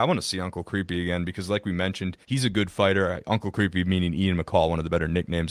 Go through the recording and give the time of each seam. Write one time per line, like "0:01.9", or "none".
0:02.2